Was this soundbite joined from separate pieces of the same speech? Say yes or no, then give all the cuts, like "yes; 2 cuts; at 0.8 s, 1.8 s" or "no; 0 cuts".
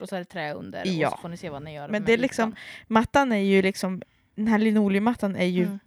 no; 0 cuts